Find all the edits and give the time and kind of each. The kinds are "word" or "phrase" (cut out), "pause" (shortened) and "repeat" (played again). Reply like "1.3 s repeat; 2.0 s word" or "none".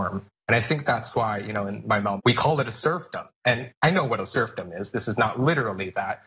2.2 s phrase; 3.8 s pause